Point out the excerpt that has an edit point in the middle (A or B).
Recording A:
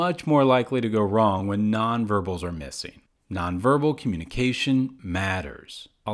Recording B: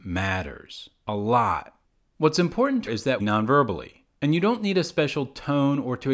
B